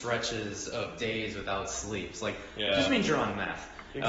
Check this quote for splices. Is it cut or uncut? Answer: uncut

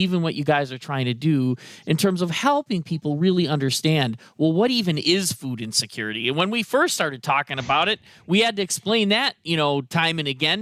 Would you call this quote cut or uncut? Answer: uncut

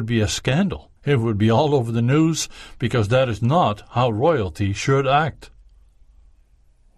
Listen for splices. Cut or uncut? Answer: cut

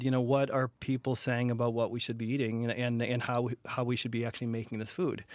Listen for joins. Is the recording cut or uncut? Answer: uncut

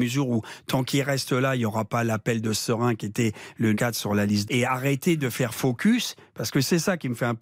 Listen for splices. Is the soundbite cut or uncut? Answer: cut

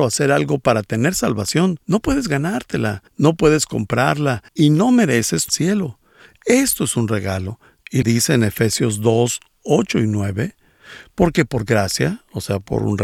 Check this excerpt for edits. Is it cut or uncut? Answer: cut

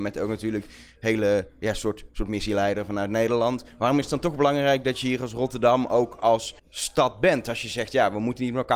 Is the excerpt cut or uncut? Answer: cut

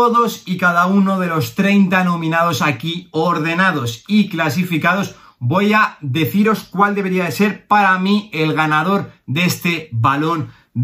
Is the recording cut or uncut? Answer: uncut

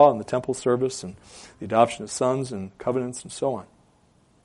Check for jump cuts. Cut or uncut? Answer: uncut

